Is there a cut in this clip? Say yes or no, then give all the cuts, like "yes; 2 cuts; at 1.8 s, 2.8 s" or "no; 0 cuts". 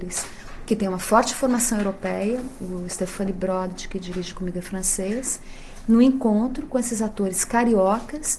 no; 0 cuts